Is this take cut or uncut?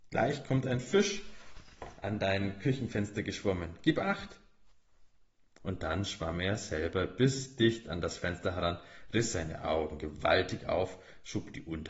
uncut